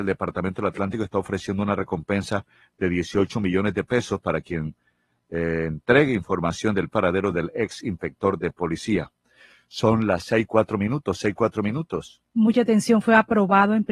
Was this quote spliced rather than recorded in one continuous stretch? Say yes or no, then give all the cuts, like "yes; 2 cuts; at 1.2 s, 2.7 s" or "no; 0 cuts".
no; 0 cuts